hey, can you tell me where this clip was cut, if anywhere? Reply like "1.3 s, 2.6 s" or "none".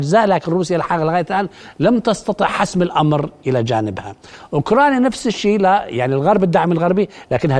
none